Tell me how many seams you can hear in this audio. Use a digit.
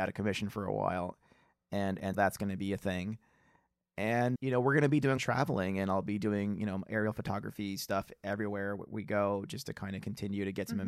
3